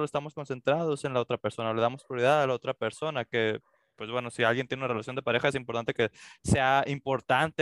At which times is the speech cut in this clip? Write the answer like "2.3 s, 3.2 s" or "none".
none

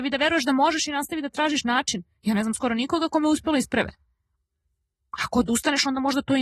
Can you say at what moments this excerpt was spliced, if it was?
none

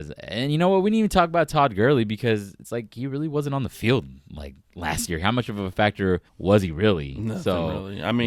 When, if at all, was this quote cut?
6.3 s

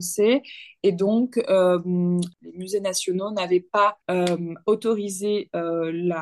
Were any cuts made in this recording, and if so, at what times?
4.0 s

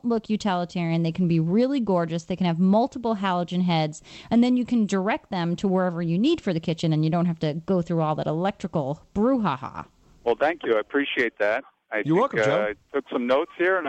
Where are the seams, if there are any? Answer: none

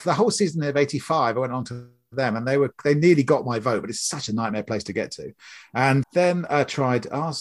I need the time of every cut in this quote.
6.0 s

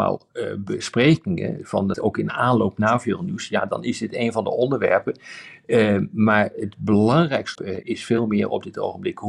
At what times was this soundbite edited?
1.9 s, 7.5 s

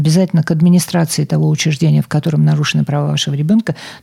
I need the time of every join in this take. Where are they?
none

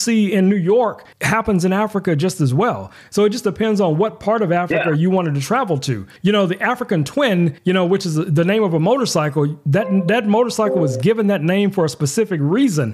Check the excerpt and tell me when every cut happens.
1.1 s, 6.2 s, 7.6 s

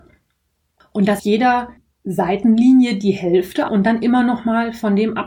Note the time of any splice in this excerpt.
1.2 s, 1.8 s, 3.7 s

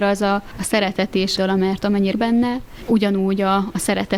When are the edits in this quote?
1.4 s, 2.1 s

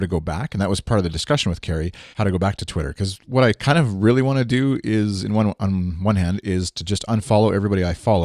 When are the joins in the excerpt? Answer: 2.1 s

